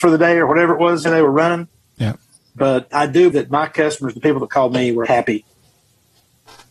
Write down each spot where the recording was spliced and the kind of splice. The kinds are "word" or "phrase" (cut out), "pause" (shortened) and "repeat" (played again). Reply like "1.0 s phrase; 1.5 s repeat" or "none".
1.1 s word; 2.9 s word; 3.3 s word; 5.1 s word

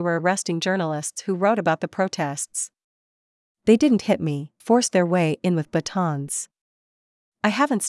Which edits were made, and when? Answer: 4.6 s word

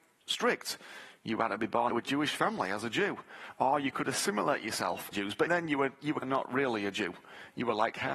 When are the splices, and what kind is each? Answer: 1.9 s word; 5.1 s word; 5.5 s word; 6.2 s word

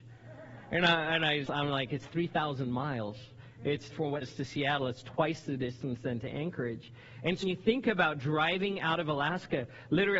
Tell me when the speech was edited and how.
1.4 s word; 3.9 s phrase; 4.2 s word; 7.4 s word

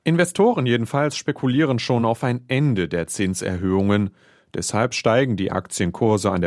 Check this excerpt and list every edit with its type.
none

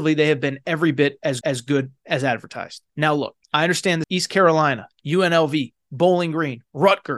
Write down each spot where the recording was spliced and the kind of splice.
1.4 s repeat; 2.9 s pause; 3.4 s pause; 4.0 s word

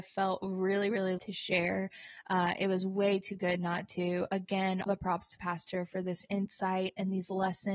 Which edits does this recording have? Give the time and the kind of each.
1.2 s word; 4.9 s word; 5.4 s word

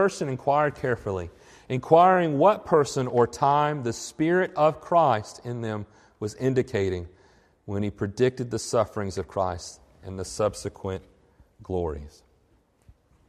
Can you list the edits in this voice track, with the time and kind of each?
none

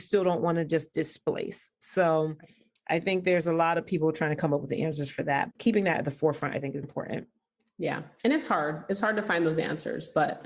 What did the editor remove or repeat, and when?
5.5 s word; 6.8 s word

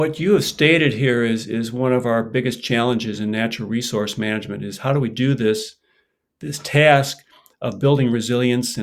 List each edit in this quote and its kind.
none

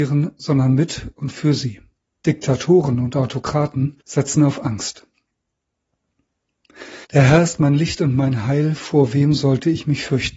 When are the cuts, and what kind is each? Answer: 2.0 s pause; 4.0 s pause; 7.0 s pause

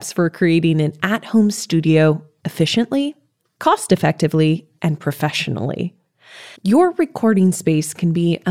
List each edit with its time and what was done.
6.6 s pause

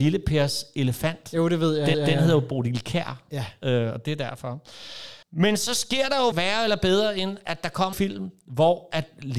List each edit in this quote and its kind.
1.9 s repeat; 5.2 s pause; 6.3 s word; 7.9 s word

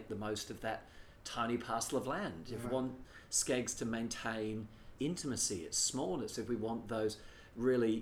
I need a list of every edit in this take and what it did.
2.6 s word; 5.0 s word

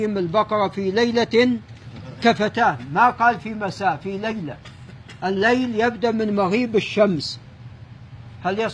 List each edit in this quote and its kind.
none

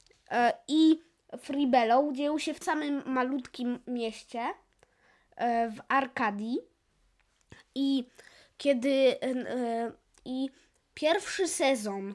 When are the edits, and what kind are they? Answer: 2.6 s word

